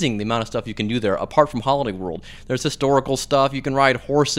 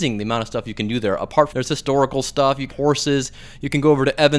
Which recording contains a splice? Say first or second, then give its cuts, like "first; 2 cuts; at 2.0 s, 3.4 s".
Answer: second; 2 cuts; at 1.5 s, 2.7 s